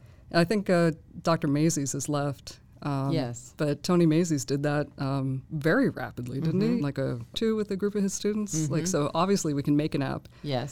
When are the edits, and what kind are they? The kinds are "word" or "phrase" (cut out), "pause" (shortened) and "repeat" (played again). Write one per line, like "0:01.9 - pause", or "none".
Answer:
0:06.8 - word
0:07.3 - phrase